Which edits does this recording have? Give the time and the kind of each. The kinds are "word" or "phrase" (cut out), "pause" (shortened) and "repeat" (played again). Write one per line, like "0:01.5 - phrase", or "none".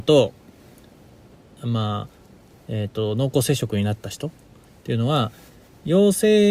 none